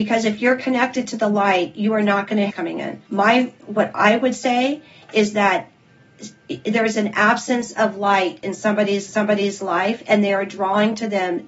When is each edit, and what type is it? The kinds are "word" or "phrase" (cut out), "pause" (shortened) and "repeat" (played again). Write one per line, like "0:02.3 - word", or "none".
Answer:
0:02.5 - phrase
0:03.1 - pause
0:09.1 - repeat